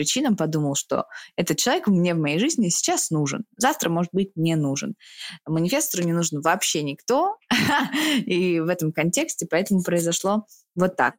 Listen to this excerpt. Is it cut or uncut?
uncut